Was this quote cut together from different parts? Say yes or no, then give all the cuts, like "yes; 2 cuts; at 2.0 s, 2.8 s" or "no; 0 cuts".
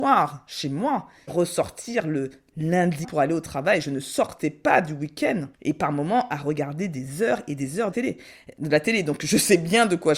yes; 4 cuts; at 1.3 s, 3.0 s, 5.5 s, 7.9 s